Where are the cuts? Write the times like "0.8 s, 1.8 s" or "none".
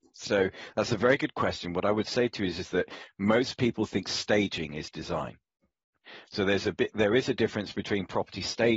none